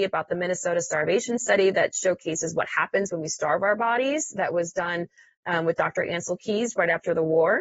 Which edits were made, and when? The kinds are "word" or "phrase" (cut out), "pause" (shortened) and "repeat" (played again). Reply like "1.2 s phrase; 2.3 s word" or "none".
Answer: none